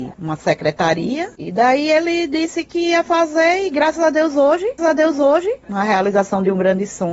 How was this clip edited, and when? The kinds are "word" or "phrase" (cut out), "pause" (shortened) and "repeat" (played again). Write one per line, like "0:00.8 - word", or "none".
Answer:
0:04.8 - repeat